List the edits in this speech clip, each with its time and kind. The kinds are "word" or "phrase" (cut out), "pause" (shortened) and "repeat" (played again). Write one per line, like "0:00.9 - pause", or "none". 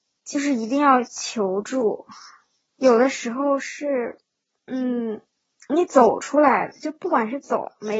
none